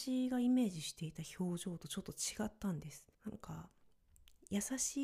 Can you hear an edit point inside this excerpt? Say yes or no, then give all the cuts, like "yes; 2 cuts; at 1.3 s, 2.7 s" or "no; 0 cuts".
yes; 1 cut; at 3.1 s